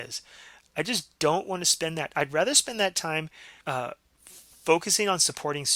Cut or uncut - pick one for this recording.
cut